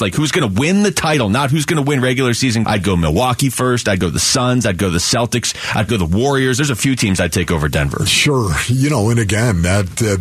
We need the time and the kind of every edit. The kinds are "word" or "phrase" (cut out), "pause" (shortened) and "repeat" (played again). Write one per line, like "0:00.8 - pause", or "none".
0:02.6 - word
0:05.9 - word